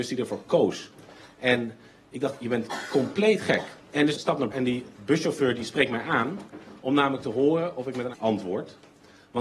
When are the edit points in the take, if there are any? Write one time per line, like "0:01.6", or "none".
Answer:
0:03.8
0:04.1
0:04.5
0:04.9
0:08.1